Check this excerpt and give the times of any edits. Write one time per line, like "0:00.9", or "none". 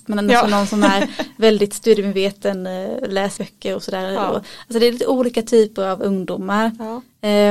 0:03.4